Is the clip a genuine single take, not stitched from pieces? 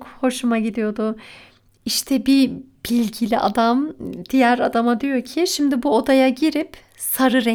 yes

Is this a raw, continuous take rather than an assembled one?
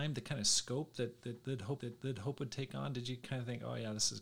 no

